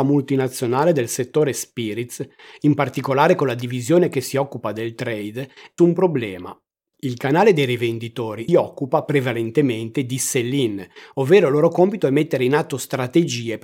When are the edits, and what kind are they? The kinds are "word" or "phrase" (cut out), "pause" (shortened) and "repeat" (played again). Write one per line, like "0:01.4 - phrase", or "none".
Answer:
0:05.8 - word
0:08.5 - word